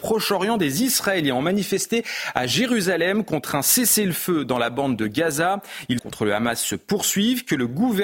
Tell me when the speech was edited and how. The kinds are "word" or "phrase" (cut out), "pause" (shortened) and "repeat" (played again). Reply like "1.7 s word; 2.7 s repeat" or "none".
6.0 s phrase